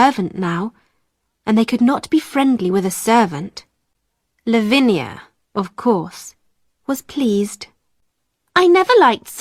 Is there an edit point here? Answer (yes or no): no